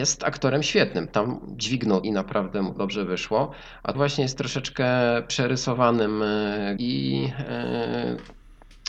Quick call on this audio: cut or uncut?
cut